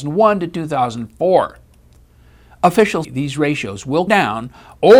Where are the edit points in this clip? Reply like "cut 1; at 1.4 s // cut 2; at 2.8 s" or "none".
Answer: cut 1; at 3.0 s // cut 2; at 4.1 s